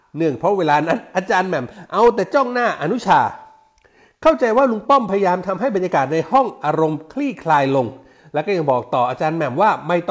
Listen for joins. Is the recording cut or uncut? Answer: uncut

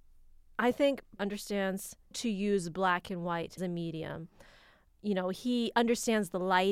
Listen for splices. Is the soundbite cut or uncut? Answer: cut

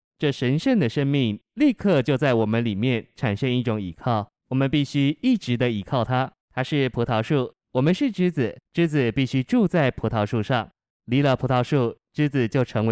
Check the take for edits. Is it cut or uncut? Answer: cut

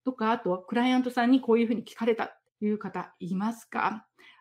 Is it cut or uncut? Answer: cut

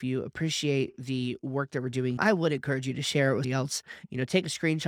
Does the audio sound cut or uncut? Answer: cut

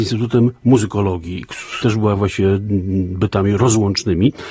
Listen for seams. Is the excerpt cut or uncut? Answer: cut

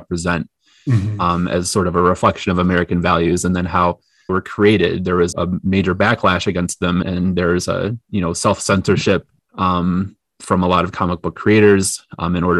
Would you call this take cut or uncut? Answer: cut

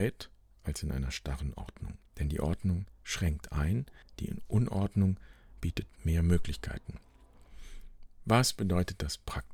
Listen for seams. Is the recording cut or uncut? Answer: cut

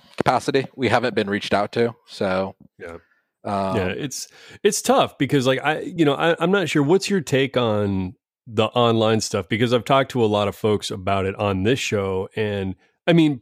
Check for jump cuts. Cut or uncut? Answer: uncut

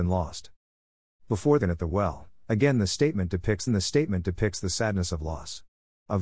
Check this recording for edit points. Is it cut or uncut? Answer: cut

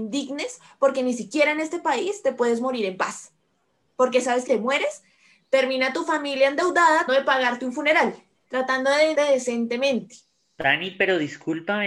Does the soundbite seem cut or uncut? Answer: cut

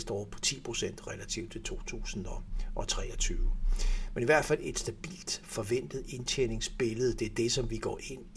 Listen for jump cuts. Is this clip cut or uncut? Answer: uncut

